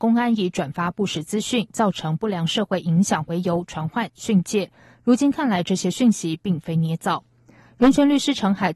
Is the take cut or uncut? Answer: uncut